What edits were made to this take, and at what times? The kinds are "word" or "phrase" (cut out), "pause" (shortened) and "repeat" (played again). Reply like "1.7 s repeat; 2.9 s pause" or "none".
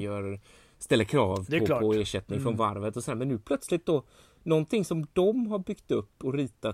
none